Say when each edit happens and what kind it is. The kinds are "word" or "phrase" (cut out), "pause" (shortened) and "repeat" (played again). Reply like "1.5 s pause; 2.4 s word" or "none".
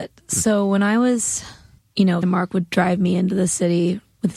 1.8 s pause; 2.2 s word